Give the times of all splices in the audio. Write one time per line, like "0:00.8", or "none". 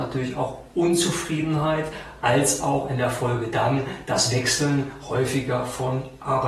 none